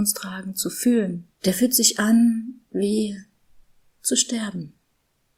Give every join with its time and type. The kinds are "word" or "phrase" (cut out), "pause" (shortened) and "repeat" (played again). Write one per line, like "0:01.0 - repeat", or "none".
0:01.3 - pause